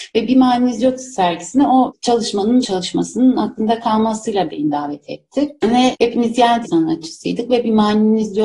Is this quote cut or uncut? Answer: cut